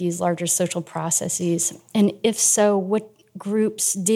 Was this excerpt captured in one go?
yes; 0 cuts

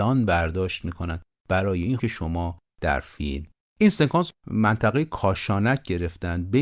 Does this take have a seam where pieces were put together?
yes; 3 cuts; at 2.0 s, 3.7 s, 4.3 s

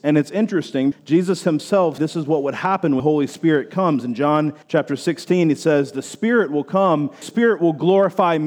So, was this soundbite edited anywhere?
yes; 5 cuts; at 0.9 s, 2.0 s, 3.0 s, 4.6 s, 7.2 s

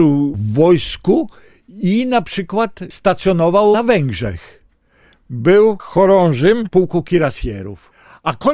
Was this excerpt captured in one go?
yes; 0 cuts

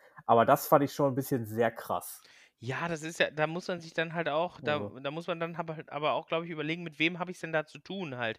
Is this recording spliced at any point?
no; 0 cuts

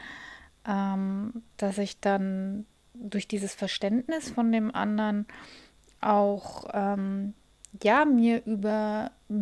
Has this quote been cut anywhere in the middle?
no; 0 cuts

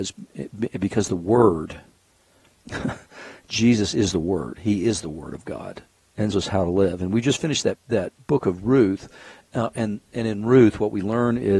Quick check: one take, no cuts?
no; 1 cut; at 6.3 s

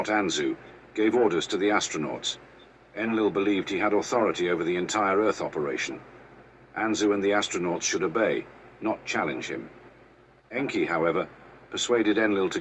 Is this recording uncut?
yes; 0 cuts

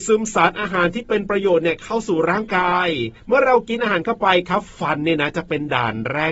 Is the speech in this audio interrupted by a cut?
yes; 1 cut; at 3.2 s

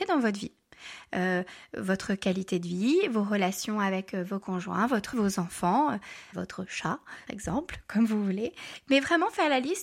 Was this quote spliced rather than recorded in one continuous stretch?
yes; 4 cuts; at 4.4 s, 5.1 s, 6.3 s, 7.3 s

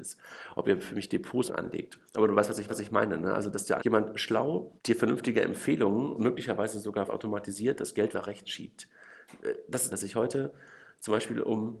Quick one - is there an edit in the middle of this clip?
yes; 9 cuts; at 1.5 s, 2.1 s, 2.7 s, 3.8 s, 4.8 s, 6.2 s, 7.1 s, 8.1 s, 9.9 s

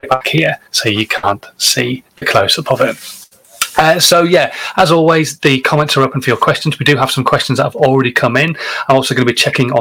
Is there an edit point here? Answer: no; 0 cuts

